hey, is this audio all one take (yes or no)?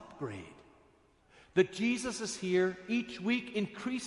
yes